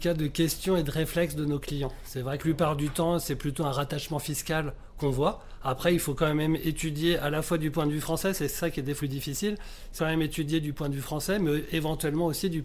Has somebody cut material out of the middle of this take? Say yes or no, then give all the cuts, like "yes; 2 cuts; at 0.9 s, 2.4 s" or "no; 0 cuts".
yes; 3 cuts; at 2.4 s, 9.0 s, 10.0 s